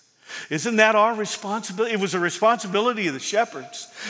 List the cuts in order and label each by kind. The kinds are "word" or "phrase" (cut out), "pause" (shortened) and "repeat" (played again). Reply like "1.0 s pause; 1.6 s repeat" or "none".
none